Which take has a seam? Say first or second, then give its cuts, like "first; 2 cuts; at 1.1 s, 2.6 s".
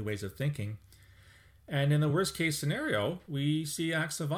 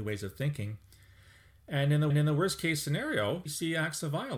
second; 2 cuts; at 2.1 s, 3.5 s